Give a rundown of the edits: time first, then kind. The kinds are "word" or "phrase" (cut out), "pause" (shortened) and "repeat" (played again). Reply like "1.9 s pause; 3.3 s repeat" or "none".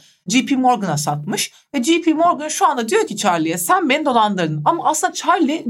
none